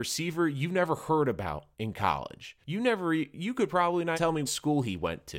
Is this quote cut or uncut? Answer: cut